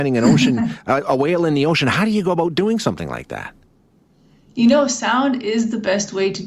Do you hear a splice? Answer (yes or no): no